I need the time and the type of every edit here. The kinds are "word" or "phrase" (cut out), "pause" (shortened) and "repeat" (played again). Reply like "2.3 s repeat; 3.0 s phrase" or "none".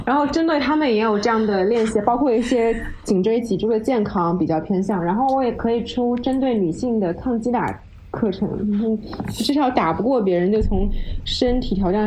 none